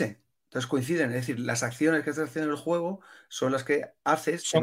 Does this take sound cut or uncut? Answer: uncut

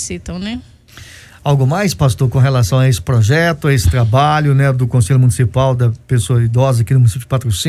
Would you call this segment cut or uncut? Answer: uncut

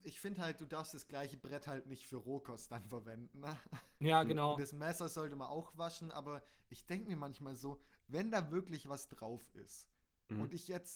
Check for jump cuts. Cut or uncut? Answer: uncut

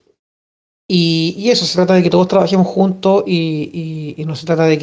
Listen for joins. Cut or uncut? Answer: uncut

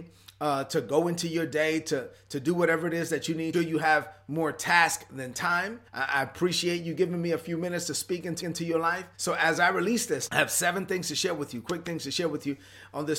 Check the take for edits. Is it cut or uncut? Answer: cut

